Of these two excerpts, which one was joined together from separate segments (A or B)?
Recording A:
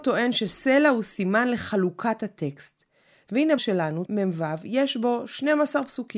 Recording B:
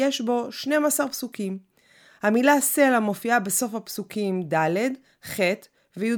A